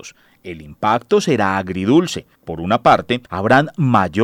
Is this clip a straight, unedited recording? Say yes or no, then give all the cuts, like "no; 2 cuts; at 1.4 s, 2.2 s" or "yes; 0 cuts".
no; 2 cuts; at 2.4 s, 3.3 s